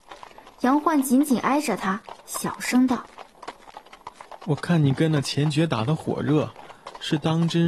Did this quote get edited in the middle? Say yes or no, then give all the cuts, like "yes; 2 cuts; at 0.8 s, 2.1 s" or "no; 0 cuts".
no; 0 cuts